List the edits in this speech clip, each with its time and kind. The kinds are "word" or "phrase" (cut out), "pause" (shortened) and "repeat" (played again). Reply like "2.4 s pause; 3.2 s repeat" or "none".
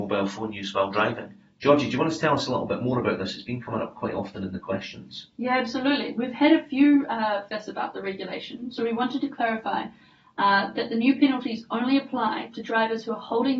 7.5 s phrase